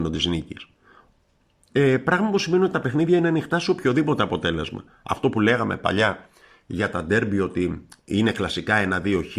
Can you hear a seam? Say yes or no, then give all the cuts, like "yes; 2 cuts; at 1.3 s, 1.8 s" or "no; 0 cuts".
no; 0 cuts